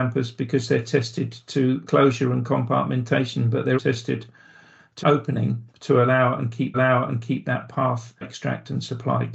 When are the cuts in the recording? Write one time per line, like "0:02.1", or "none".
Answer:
0:01.9
0:03.7
0:05.0
0:05.7
0:06.7
0:08.2